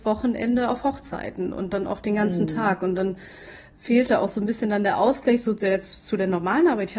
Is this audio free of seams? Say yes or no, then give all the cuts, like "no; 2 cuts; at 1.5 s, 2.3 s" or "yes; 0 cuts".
yes; 0 cuts